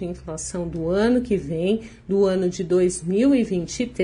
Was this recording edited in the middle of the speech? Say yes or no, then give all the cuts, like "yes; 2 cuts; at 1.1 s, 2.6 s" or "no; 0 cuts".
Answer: no; 0 cuts